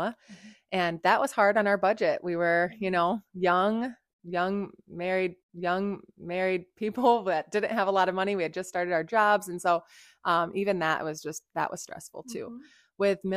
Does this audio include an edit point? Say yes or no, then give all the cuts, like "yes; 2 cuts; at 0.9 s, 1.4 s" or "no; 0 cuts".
yes; 1 cut; at 5.4 s